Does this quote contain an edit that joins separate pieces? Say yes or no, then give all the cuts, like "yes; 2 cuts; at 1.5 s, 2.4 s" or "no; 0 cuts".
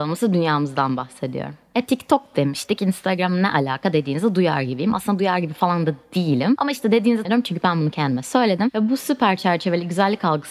yes; 1 cut; at 7.2 s